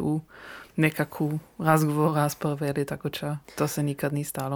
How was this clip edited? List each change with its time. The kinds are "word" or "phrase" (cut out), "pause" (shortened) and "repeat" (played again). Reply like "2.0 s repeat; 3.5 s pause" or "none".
3.4 s pause